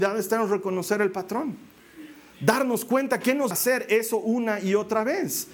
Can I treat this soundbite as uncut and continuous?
no; 1 cut; at 3.5 s

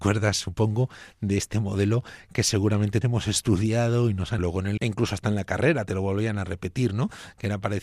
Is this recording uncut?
no; 3 cuts; at 3.0 s, 4.4 s, 4.8 s

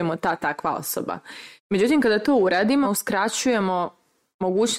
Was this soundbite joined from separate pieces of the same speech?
yes; 2 cuts; at 1.6 s, 2.8 s

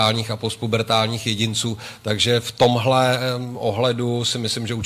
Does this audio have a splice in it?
no; 0 cuts

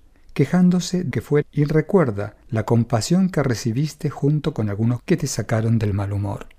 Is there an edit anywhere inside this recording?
yes; 4 cuts; at 1.1 s, 1.4 s, 2.4 s, 5.0 s

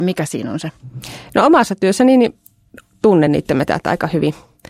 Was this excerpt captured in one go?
yes; 0 cuts

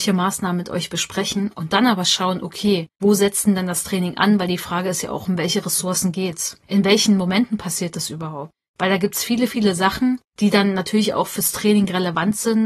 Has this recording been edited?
no; 0 cuts

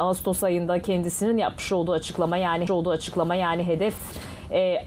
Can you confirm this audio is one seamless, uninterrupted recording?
no; 1 cut; at 2.7 s

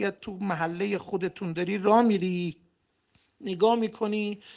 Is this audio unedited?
yes; 0 cuts

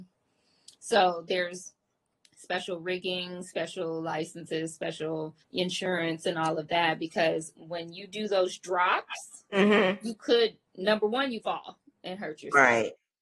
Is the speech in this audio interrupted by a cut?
yes; 3 cuts; at 5.4 s, 10.7 s, 11.4 s

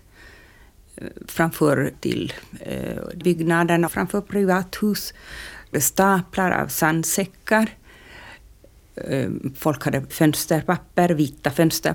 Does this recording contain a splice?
yes; 5 cuts; at 1.9 s, 3.2 s, 3.9 s, 5.7 s, 10.1 s

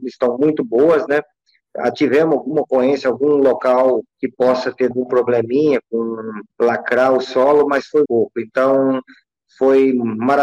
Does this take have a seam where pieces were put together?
yes; 4 cuts; at 4.1 s, 4.9 s, 6.5 s, 8.0 s

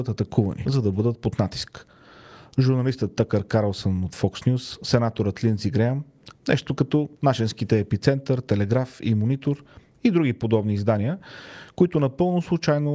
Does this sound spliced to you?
yes; 1 cut; at 7.2 s

